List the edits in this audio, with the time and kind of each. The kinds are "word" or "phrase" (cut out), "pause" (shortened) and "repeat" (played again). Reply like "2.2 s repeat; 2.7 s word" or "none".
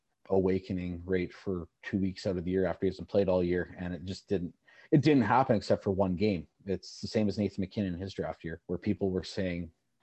8.6 s pause